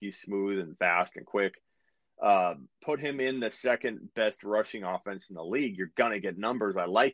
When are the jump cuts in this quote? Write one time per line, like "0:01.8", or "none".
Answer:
none

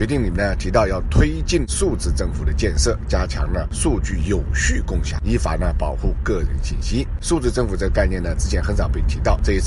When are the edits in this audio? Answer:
none

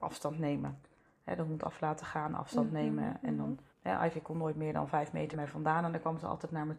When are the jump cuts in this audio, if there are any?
0:03.7
0:05.3

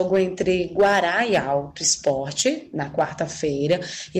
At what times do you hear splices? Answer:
none

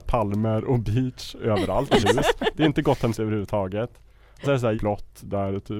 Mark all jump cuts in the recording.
0:02.0
0:03.1
0:04.4
0:04.7

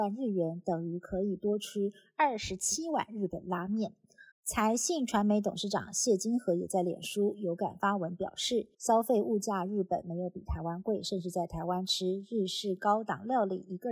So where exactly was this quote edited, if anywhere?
0:04.3
0:08.7

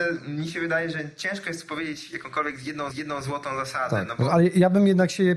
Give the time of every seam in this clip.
0:02.9

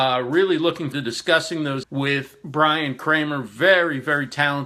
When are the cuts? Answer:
0:00.9
0:01.8

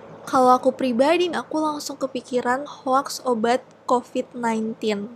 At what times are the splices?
0:01.3
0:02.7

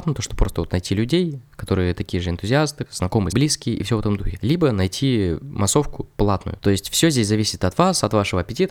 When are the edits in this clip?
0:02.9
0:03.3

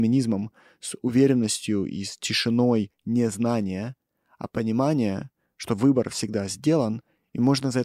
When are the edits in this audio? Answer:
none

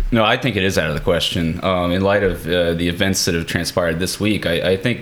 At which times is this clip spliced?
none

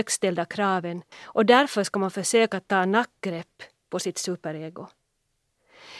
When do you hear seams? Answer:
0:01.1

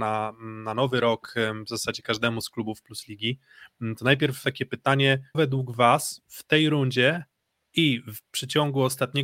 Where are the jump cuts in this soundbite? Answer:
0:04.4
0:05.3

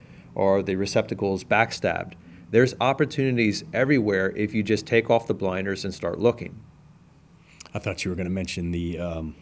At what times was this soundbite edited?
none

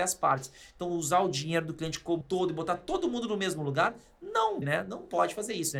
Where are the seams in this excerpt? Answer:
0:02.2
0:04.6

